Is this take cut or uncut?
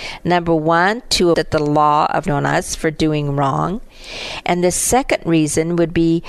cut